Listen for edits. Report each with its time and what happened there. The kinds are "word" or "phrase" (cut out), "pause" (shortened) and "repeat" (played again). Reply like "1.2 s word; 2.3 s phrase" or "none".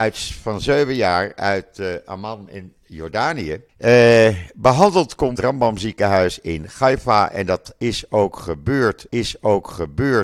3.7 s pause; 5.4 s phrase; 9.1 s repeat